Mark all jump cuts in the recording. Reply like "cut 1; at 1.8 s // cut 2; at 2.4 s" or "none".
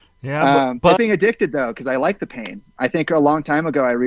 cut 1; at 1.0 s